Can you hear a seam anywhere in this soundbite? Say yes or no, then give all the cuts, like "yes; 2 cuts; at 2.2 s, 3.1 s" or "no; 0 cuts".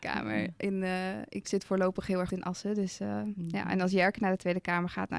yes; 2 cuts; at 1.4 s, 2.3 s